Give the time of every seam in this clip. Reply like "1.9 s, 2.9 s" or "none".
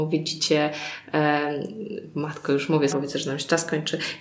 2.9 s